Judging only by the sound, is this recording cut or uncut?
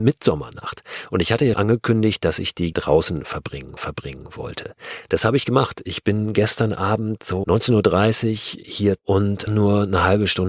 cut